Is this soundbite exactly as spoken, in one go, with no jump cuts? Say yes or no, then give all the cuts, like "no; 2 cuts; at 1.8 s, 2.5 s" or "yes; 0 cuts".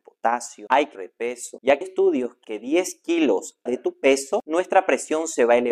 no; 4 cuts; at 0.9 s, 1.8 s, 2.4 s, 3.7 s